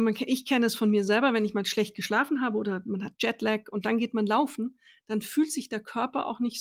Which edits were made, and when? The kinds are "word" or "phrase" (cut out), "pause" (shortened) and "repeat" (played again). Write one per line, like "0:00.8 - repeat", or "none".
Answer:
none

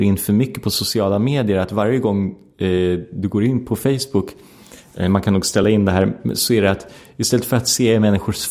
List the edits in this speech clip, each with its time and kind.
none

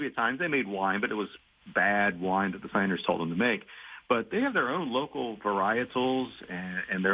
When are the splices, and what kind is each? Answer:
0:02.7 - word

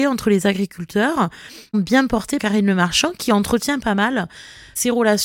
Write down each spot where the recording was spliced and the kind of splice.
0:01.7 - word
0:02.4 - word

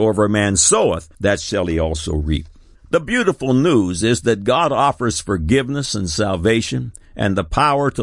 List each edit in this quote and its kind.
0:01.1 - pause
0:02.7 - pause

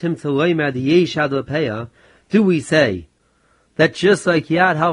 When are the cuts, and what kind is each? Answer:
none

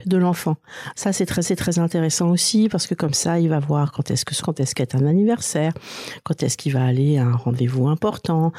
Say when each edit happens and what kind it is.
0:01.4 - repeat
0:04.4 - phrase

